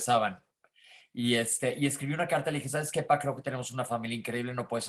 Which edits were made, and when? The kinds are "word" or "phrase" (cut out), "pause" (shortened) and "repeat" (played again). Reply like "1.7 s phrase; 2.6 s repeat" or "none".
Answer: none